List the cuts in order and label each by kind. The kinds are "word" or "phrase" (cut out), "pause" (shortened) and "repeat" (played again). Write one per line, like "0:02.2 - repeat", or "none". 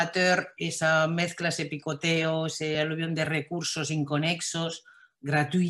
none